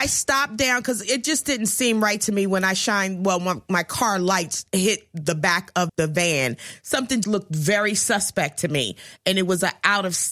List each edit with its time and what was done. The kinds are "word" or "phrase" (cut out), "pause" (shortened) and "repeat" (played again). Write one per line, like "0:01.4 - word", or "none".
0:05.9 - word
0:07.2 - word

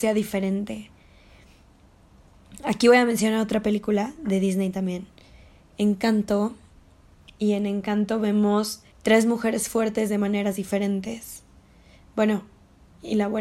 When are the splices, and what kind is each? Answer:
0:08.9 - pause

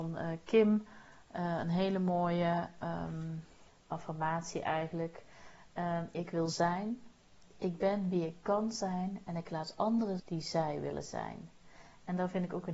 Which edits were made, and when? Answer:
0:06.1 - phrase
0:10.2 - word

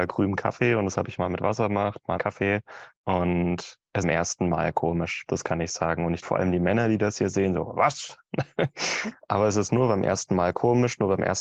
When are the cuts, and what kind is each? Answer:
0:02.2 - word
0:02.9 - pause
0:04.0 - phrase
0:06.2 - word

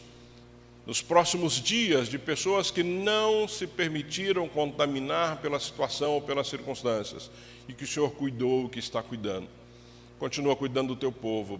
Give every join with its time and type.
none

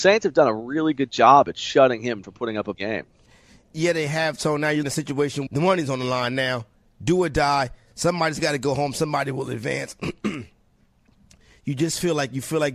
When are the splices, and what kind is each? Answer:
0:02.2 - word
0:02.7 - word
0:04.8 - word
0:05.5 - word

